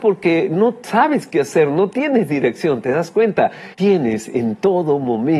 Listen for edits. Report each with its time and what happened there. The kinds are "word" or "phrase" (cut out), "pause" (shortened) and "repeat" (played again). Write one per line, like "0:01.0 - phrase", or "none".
0:03.7 - pause